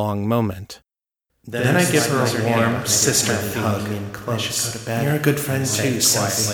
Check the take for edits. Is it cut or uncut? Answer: uncut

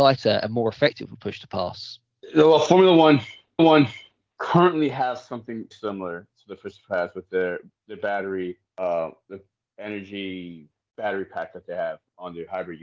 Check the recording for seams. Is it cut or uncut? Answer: cut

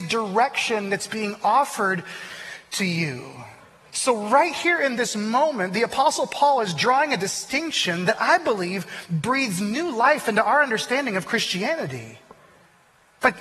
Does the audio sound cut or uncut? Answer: uncut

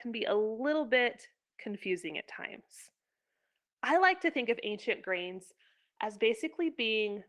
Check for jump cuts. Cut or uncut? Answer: uncut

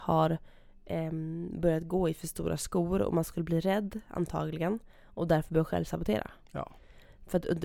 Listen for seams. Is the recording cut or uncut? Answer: uncut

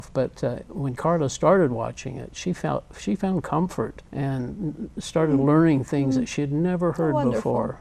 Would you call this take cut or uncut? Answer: cut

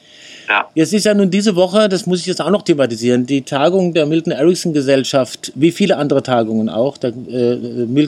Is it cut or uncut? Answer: uncut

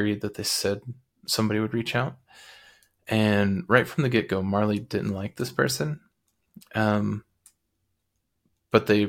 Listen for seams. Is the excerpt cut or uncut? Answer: uncut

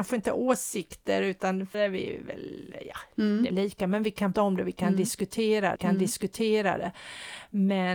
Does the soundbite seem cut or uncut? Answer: cut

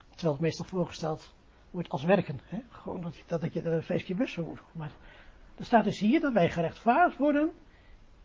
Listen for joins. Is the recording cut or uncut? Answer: uncut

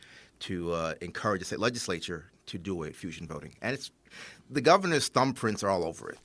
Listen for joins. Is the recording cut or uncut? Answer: uncut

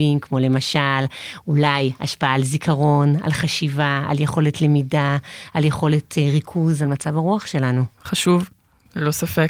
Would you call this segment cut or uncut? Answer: cut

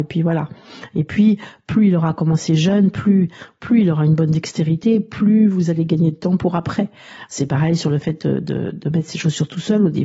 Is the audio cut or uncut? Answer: uncut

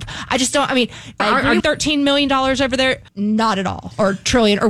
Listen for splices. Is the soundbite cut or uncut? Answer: cut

